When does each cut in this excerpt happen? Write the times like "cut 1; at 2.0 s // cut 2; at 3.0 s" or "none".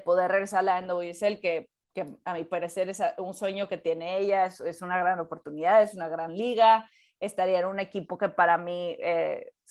none